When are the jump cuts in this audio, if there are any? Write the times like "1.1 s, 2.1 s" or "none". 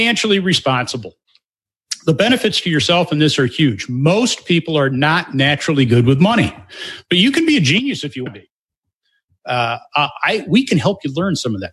8.3 s

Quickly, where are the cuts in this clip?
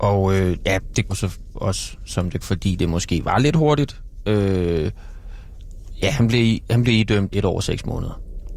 1.1 s, 2.4 s, 7.3 s

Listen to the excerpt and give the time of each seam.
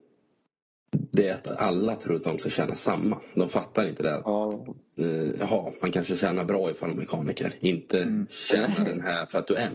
6.9 s

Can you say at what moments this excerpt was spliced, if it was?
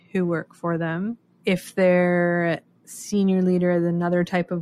2.8 s

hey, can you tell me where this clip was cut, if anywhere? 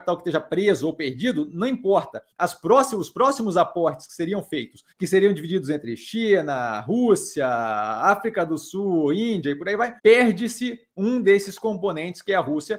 2.3 s, 4.9 s, 10.0 s

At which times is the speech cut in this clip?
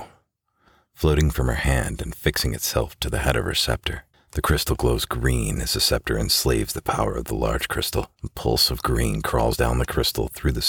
4.1 s, 8.1 s

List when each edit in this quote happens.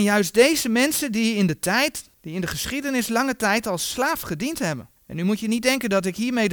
2.1 s, 5.0 s

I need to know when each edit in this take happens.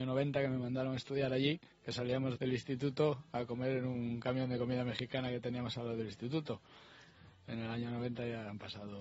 1.7 s, 2.4 s

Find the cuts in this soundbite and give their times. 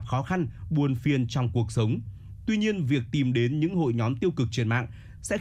none

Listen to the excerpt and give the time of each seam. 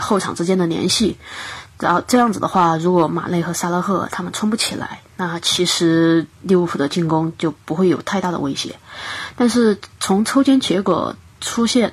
6.3 s

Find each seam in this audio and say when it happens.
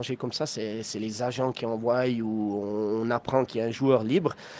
3.5 s

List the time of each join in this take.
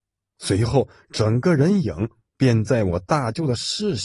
none

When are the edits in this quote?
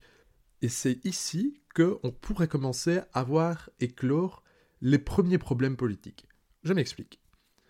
none

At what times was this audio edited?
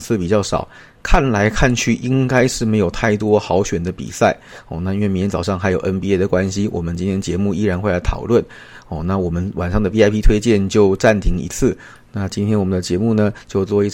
none

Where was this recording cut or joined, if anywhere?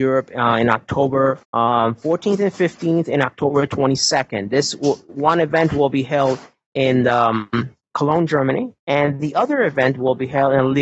1.4 s, 8.8 s

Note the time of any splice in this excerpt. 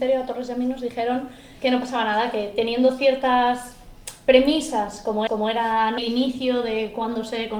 1.6 s, 5.3 s, 6.0 s

